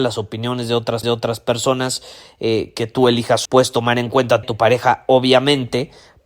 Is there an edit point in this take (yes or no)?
yes